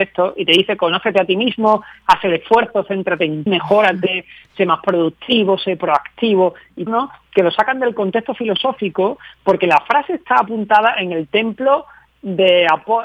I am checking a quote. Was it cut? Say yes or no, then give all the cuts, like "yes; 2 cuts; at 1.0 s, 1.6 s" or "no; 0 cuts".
yes; 2 cuts; at 3.5 s, 6.9 s